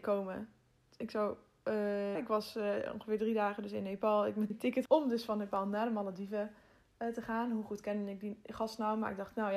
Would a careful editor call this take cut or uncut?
cut